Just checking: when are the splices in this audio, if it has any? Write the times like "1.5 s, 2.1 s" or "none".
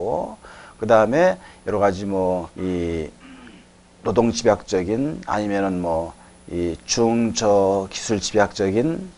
2.5 s